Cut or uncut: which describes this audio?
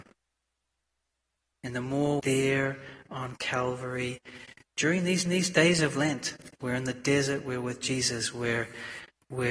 cut